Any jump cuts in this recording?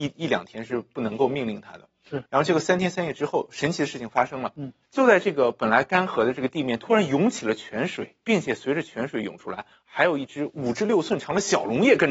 yes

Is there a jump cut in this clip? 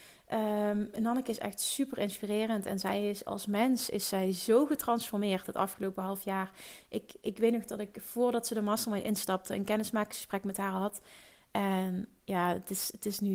no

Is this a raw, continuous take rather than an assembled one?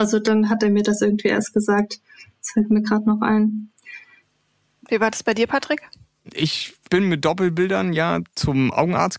yes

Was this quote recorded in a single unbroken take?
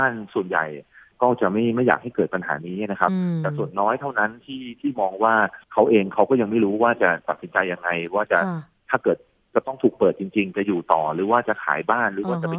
no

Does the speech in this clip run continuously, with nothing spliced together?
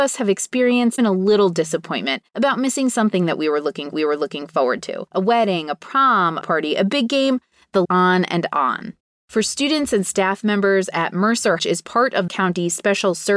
no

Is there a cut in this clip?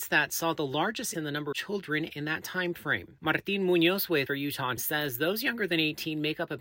yes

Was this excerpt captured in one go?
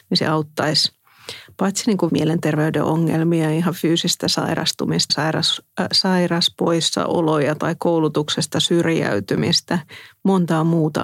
no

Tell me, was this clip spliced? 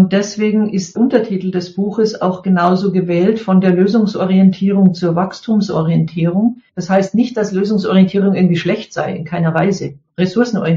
yes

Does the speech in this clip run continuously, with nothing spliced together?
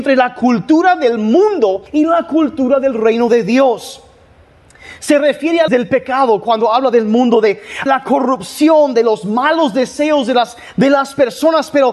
no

